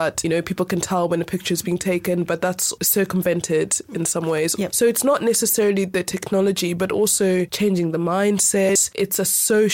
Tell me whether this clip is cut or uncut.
uncut